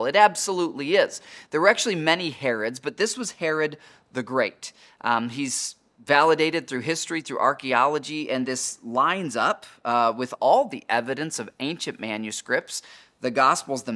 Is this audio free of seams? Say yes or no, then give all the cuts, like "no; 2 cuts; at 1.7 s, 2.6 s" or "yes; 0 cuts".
yes; 0 cuts